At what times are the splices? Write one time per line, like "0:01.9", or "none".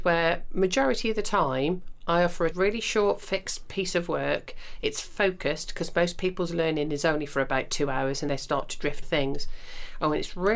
0:02.5
0:08.3
0:09.0

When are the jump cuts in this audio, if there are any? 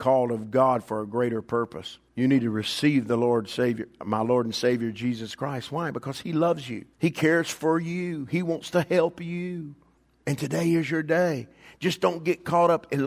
0:02.1
0:06.9
0:10.0

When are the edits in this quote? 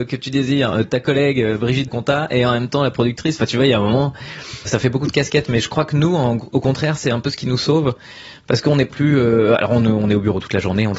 0:01.9
0:04.7
0:08.9

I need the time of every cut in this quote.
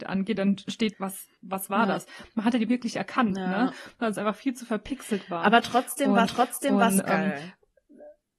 0:00.9
0:01.4
0:02.7
0:06.3

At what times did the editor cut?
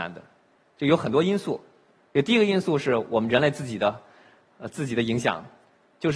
none

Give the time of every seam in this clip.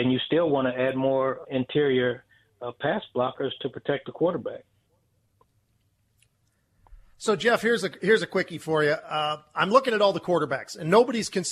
0:01.4

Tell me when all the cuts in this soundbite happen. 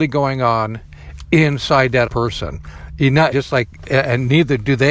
0:02.1
0:03.3

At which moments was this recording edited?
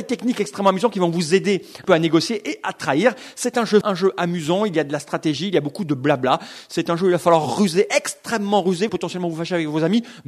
0:01.8
0:03.8
0:08.9

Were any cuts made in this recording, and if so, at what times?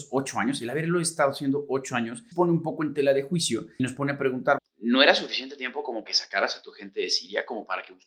0:02.3
0:03.8
0:04.6
0:06.1

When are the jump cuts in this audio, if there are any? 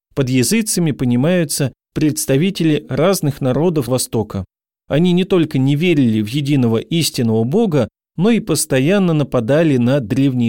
0:03.9

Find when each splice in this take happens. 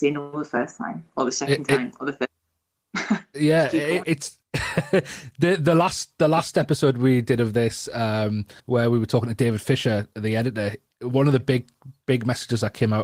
0:01.1
0:04.4
0:08.6

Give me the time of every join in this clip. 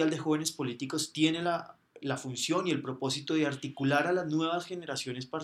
none

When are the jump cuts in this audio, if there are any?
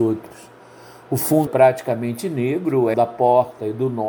0:01.5
0:02.9

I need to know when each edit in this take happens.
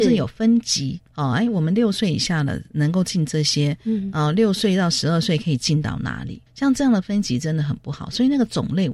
0:01.1
0:06.5

